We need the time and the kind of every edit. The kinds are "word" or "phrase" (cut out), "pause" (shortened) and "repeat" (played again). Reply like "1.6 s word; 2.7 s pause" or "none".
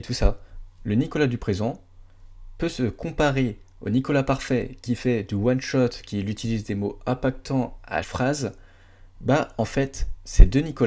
8.0 s word